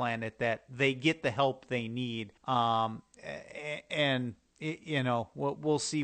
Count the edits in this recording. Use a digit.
1